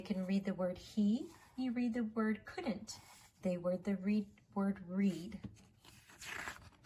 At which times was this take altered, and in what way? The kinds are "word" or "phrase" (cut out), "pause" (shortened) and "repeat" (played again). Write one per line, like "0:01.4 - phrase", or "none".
none

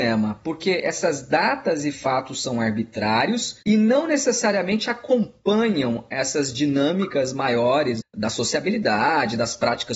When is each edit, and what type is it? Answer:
0:03.6 - pause
0:08.0 - word

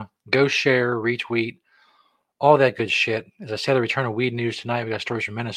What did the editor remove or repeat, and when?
none

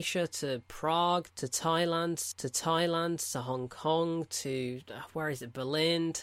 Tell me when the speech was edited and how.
0:02.3 - repeat

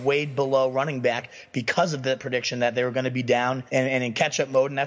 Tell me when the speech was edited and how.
0:03.7 - pause

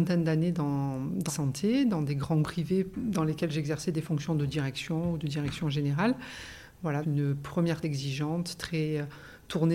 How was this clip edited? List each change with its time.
0:01.3 - word
0:02.4 - word
0:07.0 - word
0:07.8 - phrase

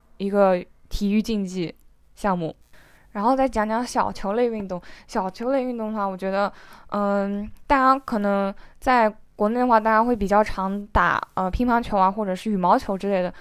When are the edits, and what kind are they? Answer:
none

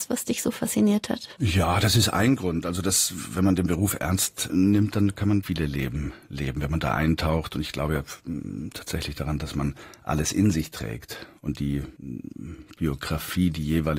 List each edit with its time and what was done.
0:04.5 - word
0:05.4 - word

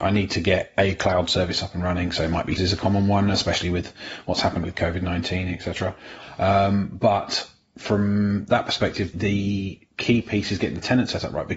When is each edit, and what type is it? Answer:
0:02.6 - word
0:04.6 - word
0:09.1 - word

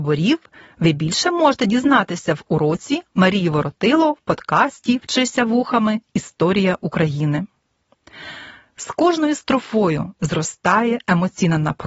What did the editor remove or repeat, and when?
none

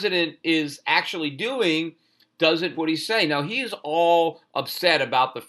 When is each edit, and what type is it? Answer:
0:02.7 - word

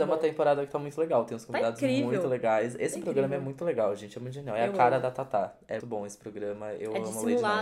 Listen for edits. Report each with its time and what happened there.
0:05.8 - word

